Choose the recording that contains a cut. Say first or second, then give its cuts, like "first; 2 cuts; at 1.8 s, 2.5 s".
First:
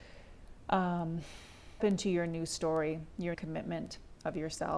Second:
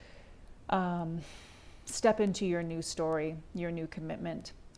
first; 2 cuts; at 1.8 s, 3.3 s